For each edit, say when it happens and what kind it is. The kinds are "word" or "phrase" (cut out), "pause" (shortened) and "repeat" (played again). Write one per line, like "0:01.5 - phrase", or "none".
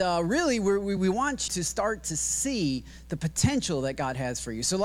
0:01.0 - word
0:01.5 - word